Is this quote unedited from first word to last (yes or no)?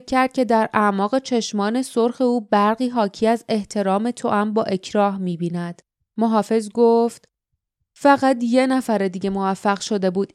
yes